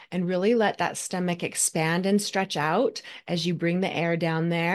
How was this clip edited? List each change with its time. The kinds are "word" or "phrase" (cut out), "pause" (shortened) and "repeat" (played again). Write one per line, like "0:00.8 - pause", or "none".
none